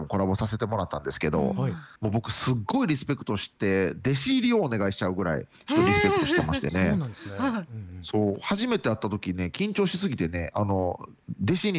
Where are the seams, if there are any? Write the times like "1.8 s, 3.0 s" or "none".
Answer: 2.0 s